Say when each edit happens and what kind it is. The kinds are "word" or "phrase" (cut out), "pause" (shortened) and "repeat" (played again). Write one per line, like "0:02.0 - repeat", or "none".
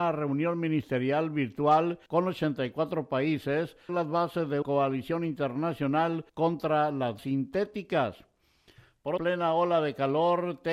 0:02.1 - pause
0:03.9 - phrase
0:04.6 - word
0:06.3 - pause
0:07.2 - word
0:09.2 - phrase